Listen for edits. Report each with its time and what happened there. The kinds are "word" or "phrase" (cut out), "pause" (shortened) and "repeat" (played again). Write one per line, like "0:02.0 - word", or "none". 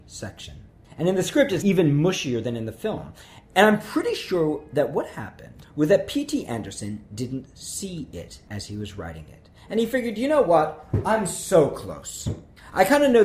0:01.6 - word

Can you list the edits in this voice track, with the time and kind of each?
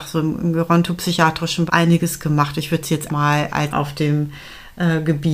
0:01.7 - word
0:03.1 - word
0:03.7 - word

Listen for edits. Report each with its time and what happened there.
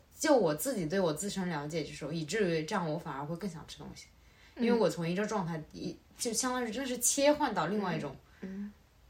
none

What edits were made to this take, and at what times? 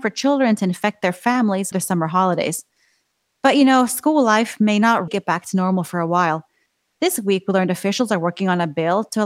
0:01.7 - word
0:05.1 - word

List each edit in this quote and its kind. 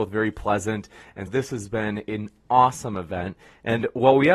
0:01.3 - word

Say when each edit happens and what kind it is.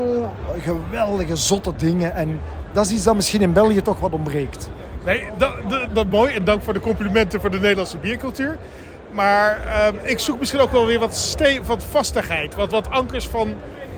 0:05.9 - word
0:12.7 - word

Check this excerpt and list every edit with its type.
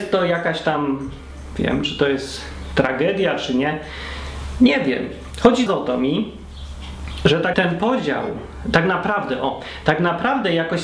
0:05.7 - word
0:07.5 - word

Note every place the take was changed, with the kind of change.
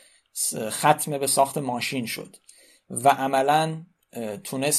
none

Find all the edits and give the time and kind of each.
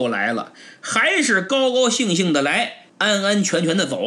0:02.9 - pause

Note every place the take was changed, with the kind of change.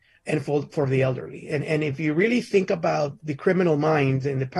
none

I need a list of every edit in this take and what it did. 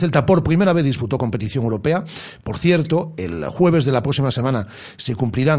none

